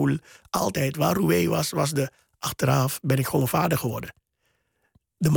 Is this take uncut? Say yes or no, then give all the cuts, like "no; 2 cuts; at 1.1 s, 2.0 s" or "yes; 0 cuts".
yes; 0 cuts